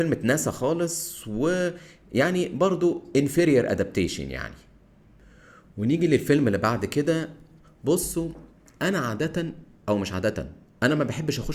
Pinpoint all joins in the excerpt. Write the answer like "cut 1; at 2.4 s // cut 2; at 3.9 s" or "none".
none